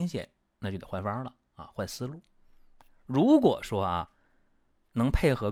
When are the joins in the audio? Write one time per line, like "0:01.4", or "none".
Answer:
none